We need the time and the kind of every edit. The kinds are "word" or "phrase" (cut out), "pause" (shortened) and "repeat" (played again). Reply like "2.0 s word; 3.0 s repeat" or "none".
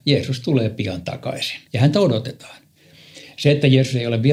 1.6 s pause